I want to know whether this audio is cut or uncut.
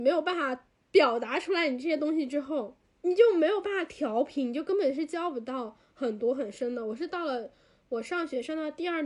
uncut